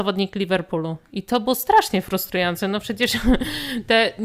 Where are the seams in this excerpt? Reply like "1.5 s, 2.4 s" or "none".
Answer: none